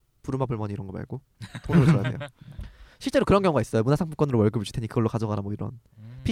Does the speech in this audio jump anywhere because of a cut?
no; 0 cuts

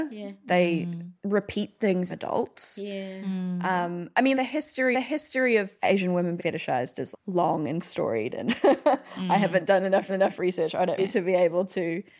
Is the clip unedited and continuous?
no; 7 cuts; at 2.1 s, 4.3 s, 4.9 s, 6.4 s, 7.1 s, 10.1 s, 11.0 s

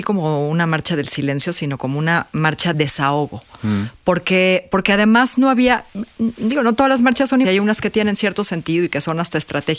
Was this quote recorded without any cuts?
no; 2 cuts; at 2.7 s, 7.4 s

